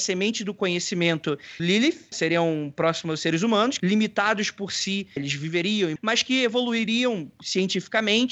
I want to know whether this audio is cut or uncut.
cut